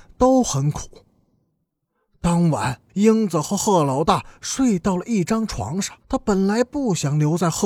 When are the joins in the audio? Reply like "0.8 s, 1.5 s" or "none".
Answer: 2.9 s, 6.0 s